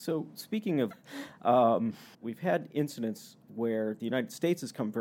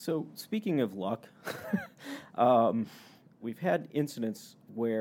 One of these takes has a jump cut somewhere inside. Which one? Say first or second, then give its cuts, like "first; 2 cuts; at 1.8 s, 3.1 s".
first; 2 cuts; at 0.9 s, 2.1 s